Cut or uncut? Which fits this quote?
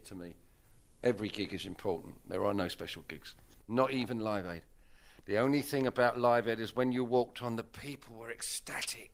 uncut